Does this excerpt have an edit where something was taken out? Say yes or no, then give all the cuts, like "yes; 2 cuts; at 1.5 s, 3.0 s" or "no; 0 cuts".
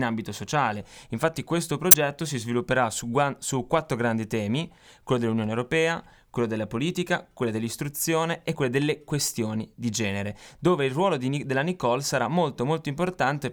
no; 0 cuts